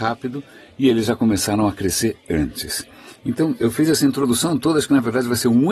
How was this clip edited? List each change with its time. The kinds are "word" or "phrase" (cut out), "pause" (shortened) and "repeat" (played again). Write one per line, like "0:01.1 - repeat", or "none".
none

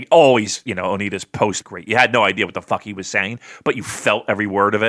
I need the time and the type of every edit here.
0:01.6 - phrase

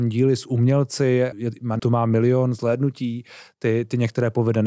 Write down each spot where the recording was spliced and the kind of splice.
0:01.3 - word
0:01.8 - word

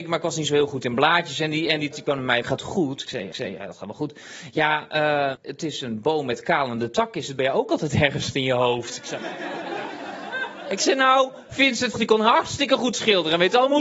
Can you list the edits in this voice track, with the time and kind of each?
0:01.9 - word
0:02.4 - word
0:03.3 - repeat
0:05.3 - word
0:11.9 - phrase

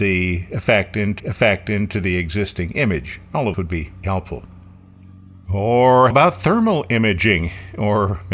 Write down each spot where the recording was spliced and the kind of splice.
0:01.2 - repeat
0:03.5 - word
0:04.0 - word
0:06.1 - word

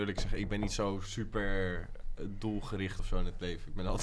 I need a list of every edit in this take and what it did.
0:03.0 - word

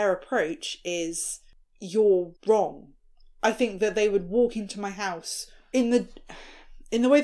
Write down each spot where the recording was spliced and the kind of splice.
0:02.4 - pause

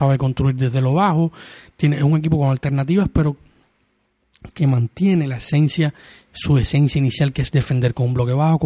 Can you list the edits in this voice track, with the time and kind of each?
none

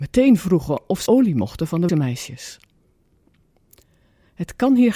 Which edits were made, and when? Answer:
0:01.1 - word
0:01.9 - word

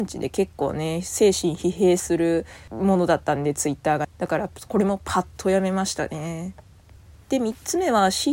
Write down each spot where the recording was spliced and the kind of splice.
none

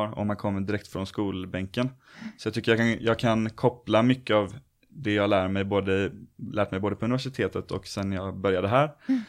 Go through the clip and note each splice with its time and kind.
none

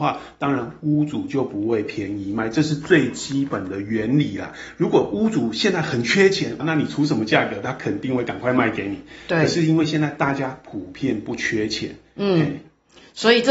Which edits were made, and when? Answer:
0:06.6 - word

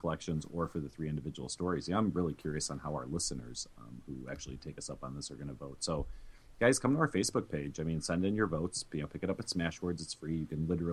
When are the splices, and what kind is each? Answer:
none

